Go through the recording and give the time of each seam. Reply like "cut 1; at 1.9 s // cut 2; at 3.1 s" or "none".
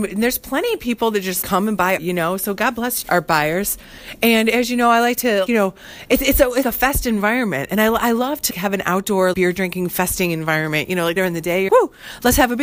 cut 1; at 1.4 s // cut 2; at 2.0 s // cut 3; at 3.0 s // cut 4; at 5.5 s // cut 5; at 6.6 s // cut 6; at 8.5 s // cut 7; at 9.3 s // cut 8; at 11.2 s // cut 9; at 11.7 s

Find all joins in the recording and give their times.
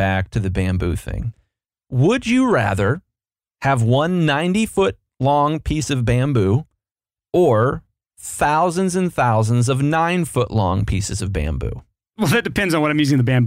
none

